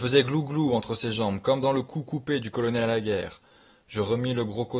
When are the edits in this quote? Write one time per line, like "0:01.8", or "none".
none